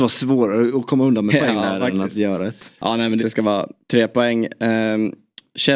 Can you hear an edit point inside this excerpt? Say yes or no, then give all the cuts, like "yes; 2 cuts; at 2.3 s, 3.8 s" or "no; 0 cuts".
yes; 3 cuts; at 1.3 s, 2.8 s, 3.2 s